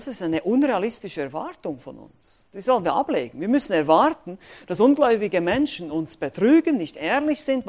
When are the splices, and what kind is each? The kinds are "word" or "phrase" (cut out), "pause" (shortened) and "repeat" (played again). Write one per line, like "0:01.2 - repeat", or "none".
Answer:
none